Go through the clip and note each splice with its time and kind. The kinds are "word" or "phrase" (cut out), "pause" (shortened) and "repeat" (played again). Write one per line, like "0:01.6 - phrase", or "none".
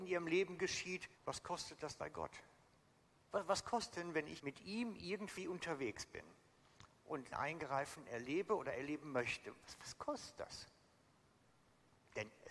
0:01.1 - pause
0:02.0 - word
0:02.8 - pause
0:03.9 - word
0:04.4 - word
0:07.3 - word